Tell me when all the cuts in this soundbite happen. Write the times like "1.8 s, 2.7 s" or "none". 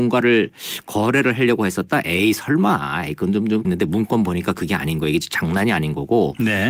3.6 s